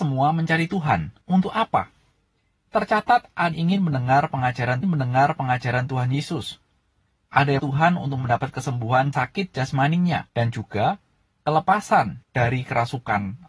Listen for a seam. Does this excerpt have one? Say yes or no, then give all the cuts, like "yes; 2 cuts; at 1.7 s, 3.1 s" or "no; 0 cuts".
yes; 7 cuts; at 1.2 s, 3.5 s, 4.8 s, 7.6 s, 9.1 s, 10.3 s, 12.2 s